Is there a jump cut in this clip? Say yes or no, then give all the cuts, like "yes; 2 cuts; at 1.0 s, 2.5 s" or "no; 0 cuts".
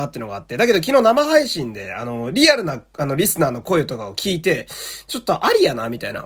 no; 0 cuts